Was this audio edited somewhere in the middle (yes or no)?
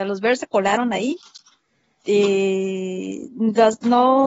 no